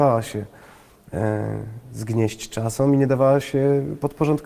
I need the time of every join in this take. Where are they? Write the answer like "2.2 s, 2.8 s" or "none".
none